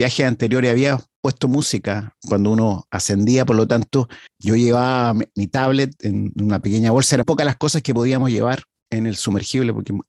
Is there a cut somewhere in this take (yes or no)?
yes